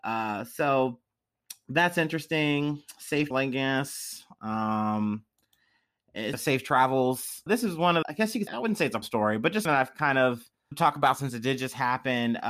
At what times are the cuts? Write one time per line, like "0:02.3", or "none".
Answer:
0:03.3
0:06.3
0:07.5
0:08.0
0:08.5
0:09.0
0:09.7
0:10.7